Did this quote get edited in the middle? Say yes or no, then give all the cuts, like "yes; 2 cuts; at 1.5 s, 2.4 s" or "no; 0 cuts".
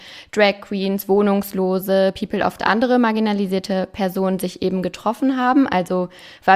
yes; 1 cut; at 2.6 s